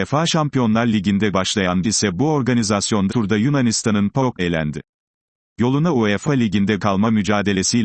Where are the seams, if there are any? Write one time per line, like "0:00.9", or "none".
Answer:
0:01.3
0:01.8
0:03.1
0:04.4
0:06.2
0:06.8